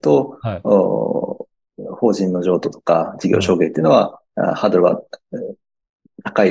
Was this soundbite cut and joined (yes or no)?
no